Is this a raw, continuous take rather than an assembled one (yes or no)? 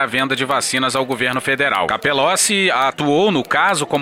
yes